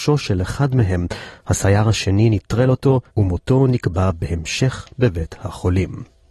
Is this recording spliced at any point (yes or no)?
yes